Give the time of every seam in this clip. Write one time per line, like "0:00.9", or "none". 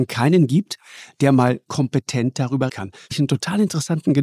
0:01.7
0:02.7
0:03.1

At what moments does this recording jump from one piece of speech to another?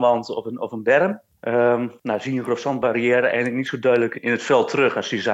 none

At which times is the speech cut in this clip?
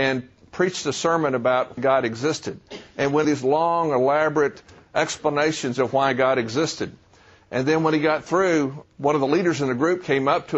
0:01.8
0:03.2
0:08.8

